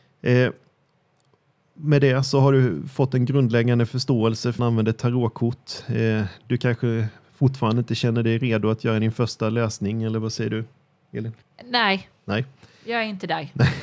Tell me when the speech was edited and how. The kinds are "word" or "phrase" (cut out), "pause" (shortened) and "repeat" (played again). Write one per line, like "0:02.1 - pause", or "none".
0:04.6 - phrase
0:11.4 - pause